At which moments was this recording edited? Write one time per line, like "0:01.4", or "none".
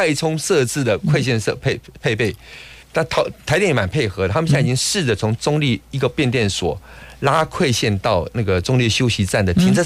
0:02.8